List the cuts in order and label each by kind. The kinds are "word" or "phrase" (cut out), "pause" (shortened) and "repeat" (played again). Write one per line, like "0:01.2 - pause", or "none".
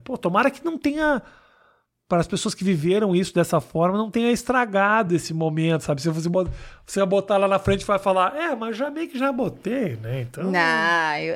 none